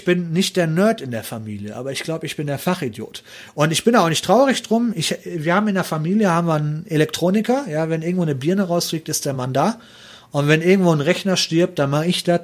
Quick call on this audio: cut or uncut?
uncut